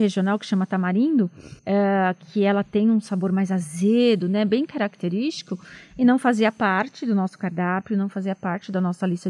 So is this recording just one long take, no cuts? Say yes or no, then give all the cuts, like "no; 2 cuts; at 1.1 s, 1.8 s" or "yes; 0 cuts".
no; 1 cut; at 1.6 s